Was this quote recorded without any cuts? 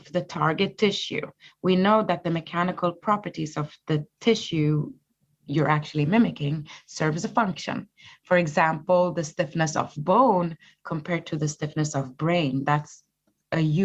yes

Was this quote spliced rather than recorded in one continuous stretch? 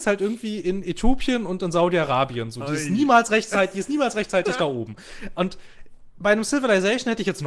no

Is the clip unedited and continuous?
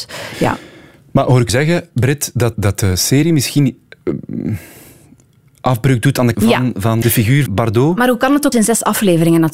no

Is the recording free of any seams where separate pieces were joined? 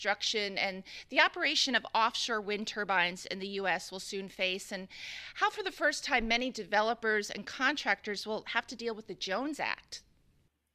yes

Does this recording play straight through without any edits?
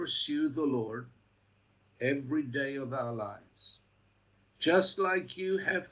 yes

